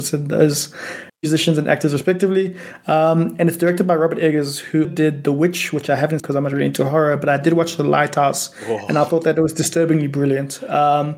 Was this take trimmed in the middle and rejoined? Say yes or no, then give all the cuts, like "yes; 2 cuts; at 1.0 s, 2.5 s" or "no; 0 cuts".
yes; 3 cuts; at 1.1 s, 4.8 s, 6.2 s